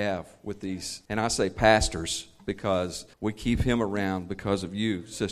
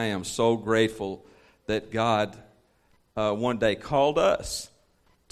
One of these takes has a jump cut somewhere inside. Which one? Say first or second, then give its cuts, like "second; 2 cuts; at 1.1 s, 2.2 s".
first; 2 cuts; at 1.0 s, 3.1 s